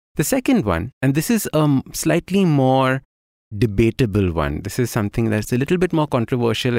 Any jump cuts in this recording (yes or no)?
yes